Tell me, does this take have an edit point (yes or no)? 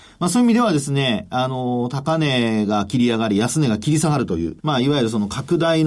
yes